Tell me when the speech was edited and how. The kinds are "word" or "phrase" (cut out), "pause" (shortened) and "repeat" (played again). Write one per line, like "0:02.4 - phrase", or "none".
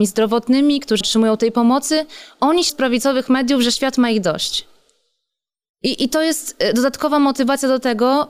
0:01.0 - word
0:02.7 - word